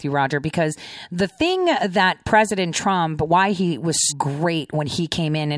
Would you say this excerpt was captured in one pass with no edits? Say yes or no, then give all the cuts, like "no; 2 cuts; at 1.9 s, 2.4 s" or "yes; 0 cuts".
no; 1 cut; at 4.1 s